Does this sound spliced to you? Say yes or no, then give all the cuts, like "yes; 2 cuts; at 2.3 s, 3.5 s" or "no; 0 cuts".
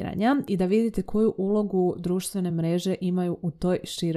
no; 0 cuts